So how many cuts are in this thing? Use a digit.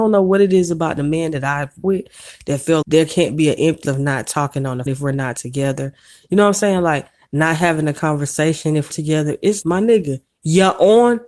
6